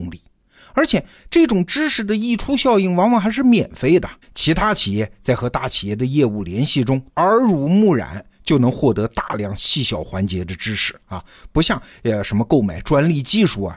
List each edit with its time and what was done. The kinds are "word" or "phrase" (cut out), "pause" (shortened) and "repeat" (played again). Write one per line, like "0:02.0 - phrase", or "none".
0:04.2 - pause
0:07.1 - pause

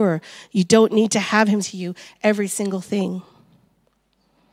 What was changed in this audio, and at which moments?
0:01.6 - word

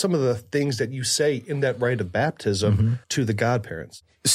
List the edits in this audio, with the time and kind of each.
0:03.0 - pause

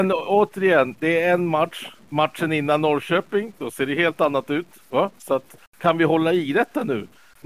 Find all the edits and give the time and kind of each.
0:05.7 - pause

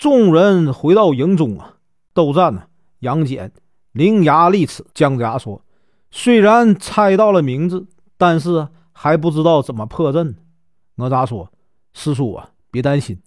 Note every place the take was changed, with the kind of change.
0:04.9 - pause

